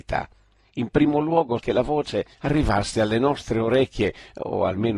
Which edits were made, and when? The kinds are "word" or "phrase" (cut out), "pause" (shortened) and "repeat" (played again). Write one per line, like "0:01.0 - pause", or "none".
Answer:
0:01.6 - word
0:02.3 - pause

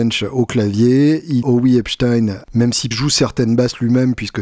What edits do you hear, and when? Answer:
0:01.4 - phrase
0:02.4 - phrase
0:02.9 - word

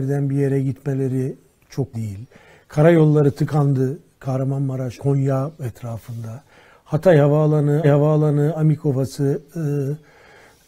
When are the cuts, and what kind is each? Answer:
0:01.9 - word
0:05.0 - word
0:05.5 - word
0:07.8 - repeat

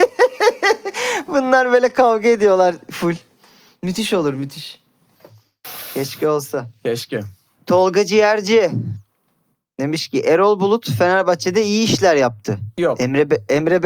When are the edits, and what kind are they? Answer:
none

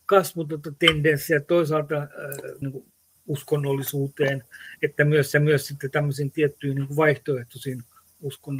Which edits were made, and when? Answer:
0:02.6 - word
0:03.2 - word
0:05.3 - repeat

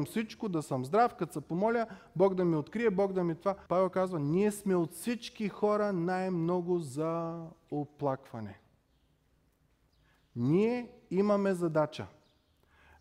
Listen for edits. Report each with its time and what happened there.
0:03.7 - pause

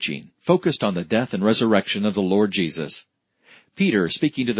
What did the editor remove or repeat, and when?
none

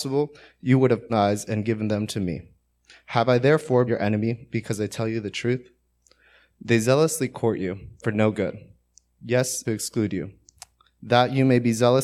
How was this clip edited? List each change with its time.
0:01.1 - phrase
0:03.9 - word
0:08.0 - word
0:09.6 - phrase

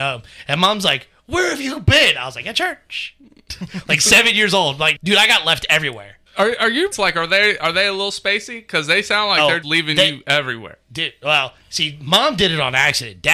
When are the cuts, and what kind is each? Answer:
0:05.0 - word
0:06.3 - pause
0:06.9 - word
0:09.6 - word

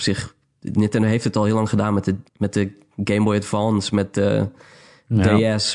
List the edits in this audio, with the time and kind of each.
0:02.3 - pause

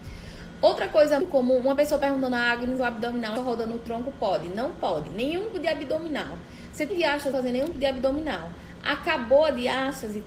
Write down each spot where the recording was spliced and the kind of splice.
0:01.2 - word
0:02.8 - phrase
0:03.4 - phrase
0:05.5 - word
0:06.9 - word
0:07.3 - phrase
0:07.7 - word

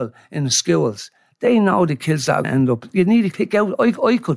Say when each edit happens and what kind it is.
0:02.4 - word
0:03.3 - word

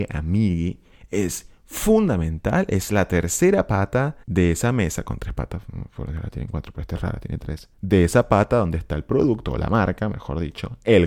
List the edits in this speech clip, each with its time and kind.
0:04.2 - pause
0:07.7 - pause

